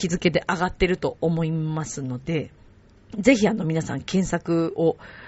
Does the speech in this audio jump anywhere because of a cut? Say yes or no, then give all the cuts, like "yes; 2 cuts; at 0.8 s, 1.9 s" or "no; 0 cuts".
yes; 1 cut; at 2.7 s